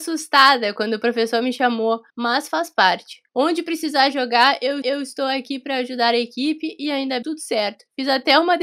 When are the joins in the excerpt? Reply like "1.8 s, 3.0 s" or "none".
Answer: 2.1 s, 3.3 s, 4.8 s, 7.2 s